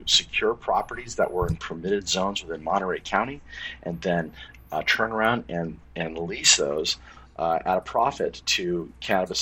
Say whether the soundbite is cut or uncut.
uncut